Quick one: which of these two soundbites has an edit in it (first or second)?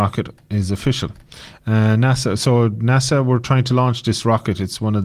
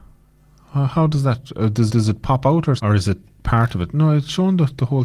second